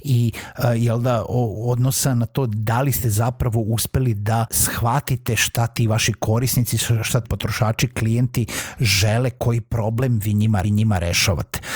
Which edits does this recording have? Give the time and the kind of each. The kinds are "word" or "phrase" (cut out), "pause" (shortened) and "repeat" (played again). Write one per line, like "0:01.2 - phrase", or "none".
0:04.5 - word
0:07.2 - word
0:10.6 - repeat